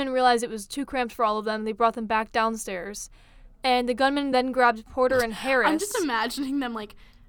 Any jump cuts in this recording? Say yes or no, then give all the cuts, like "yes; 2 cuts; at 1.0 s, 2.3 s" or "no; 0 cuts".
no; 0 cuts